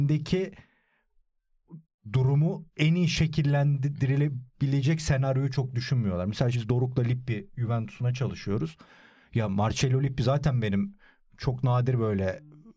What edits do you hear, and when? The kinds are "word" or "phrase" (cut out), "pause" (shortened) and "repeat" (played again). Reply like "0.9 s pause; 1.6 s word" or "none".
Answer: 6.5 s word